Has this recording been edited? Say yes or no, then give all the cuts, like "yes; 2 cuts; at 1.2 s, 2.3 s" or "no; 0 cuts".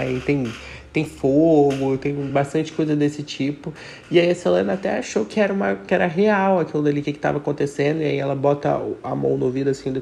no; 0 cuts